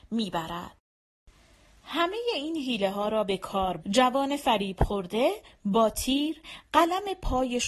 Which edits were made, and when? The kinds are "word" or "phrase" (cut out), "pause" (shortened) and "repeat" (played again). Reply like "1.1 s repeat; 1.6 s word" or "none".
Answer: 3.8 s word